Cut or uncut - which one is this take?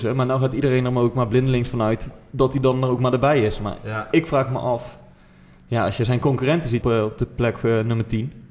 cut